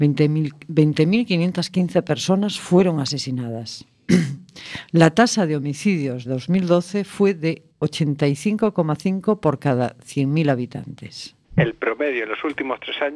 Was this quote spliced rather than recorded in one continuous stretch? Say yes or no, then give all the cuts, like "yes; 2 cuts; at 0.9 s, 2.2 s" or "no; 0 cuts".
yes; 3 cuts; at 6.3 s, 7.7 s, 11.4 s